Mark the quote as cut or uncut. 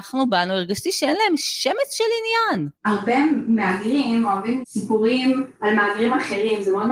cut